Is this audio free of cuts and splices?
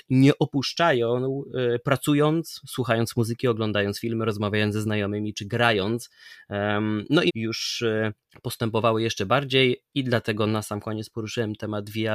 no; 2 cuts; at 7.3 s, 8.3 s

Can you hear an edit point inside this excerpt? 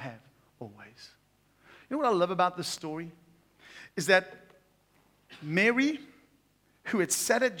no; 0 cuts

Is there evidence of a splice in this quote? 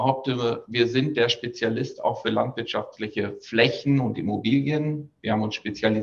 no; 0 cuts

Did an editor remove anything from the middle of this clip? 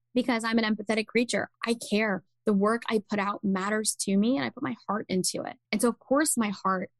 yes; 2 cuts; at 1.5 s, 5.6 s

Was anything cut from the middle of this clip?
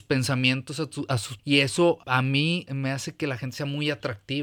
yes; 3 cuts; at 1.4 s, 2.0 s, 2.7 s

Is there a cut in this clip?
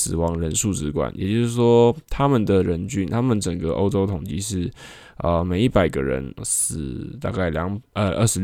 yes; 1 cut; at 6.4 s

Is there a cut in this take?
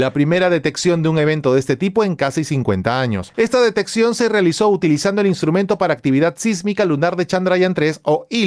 no; 0 cuts

